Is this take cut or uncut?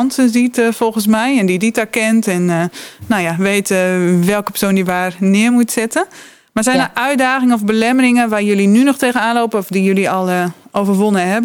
uncut